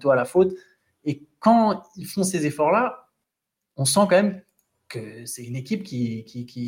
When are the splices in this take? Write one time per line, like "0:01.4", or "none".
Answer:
none